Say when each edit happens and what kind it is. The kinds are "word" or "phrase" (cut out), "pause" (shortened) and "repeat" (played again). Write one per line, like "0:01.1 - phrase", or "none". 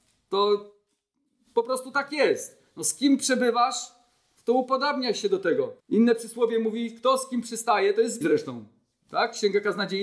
0:05.8 - pause
0:08.2 - word